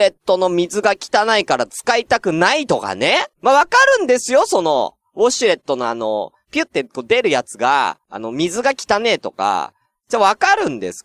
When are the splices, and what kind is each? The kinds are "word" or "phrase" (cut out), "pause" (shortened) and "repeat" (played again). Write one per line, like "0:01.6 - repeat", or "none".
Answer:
0:03.3 - pause
0:08.0 - pause

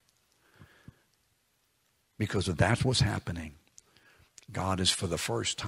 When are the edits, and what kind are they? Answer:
none

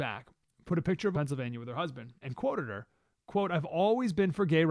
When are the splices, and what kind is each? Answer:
0:01.1 - phrase
0:02.2 - word

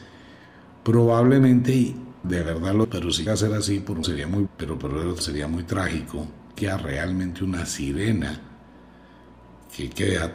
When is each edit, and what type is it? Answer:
0:02.2 - word
0:02.8 - word
0:03.3 - word
0:04.0 - word
0:04.5 - word
0:05.2 - word
0:06.6 - word

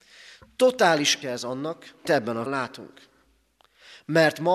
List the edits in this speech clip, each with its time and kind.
0:01.2 - word
0:02.0 - word
0:02.5 - word

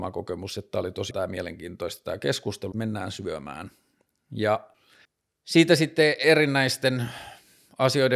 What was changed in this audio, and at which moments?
0:01.1 - word
0:02.7 - word
0:05.0 - pause

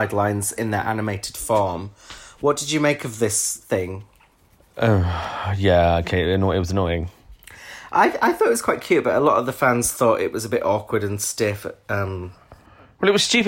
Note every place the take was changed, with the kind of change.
none

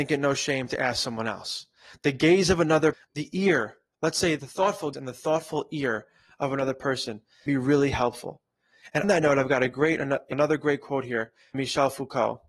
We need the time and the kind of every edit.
0:02.9 - word
0:04.4 - word
0:04.9 - word
0:07.5 - word
0:09.0 - word
0:10.3 - word
0:11.5 - word

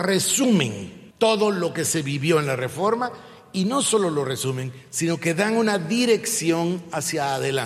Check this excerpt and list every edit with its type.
0:01.1 - pause

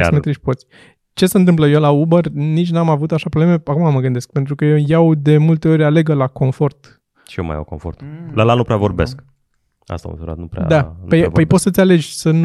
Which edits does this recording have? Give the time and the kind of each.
none

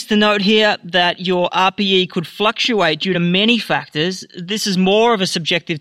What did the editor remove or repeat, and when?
none

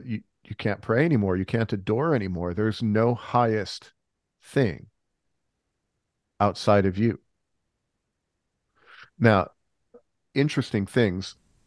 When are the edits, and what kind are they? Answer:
0:09.1 - pause

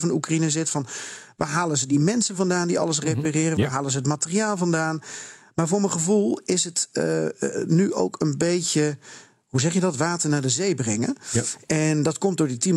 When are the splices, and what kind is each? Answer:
none

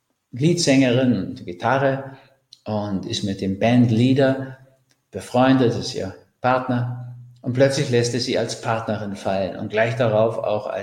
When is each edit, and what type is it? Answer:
none

